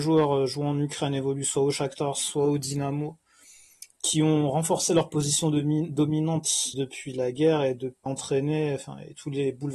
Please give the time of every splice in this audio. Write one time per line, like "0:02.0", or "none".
0:06.7
0:08.1